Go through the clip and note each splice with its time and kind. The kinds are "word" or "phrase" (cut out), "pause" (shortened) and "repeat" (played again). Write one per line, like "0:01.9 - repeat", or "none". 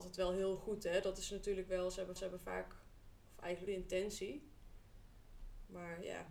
0:02.2 - repeat
0:03.7 - phrase

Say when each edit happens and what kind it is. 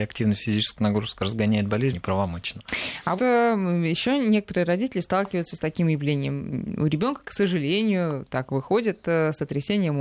0:01.9 - word
0:03.2 - word

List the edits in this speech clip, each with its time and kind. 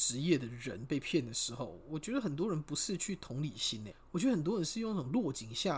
0:03.9 - word

